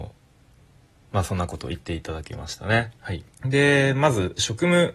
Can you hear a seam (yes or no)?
yes